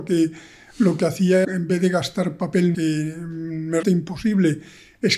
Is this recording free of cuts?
no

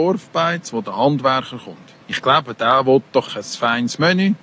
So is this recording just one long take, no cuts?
no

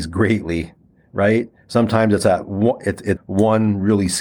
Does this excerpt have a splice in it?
yes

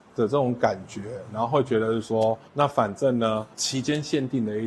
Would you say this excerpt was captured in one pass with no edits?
no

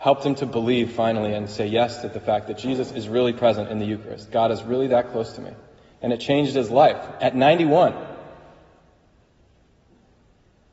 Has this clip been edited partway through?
no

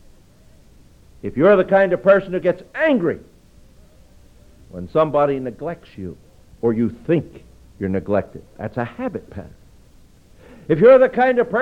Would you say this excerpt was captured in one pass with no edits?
yes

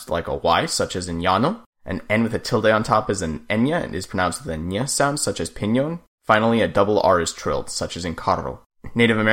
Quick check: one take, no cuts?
yes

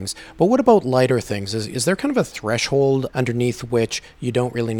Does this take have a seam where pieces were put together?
no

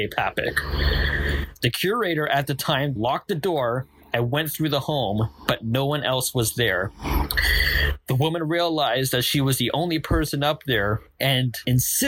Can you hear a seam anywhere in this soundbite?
yes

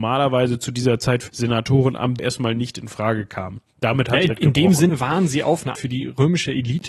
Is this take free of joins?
no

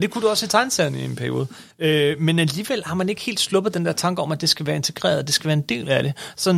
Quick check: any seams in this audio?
yes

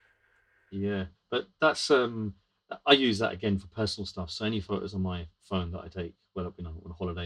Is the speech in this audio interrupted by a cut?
yes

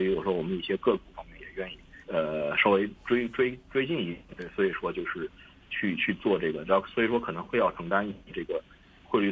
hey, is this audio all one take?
no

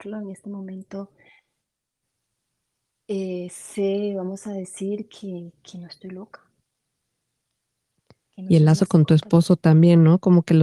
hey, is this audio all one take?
yes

